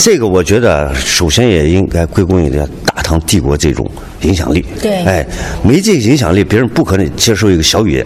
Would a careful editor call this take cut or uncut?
uncut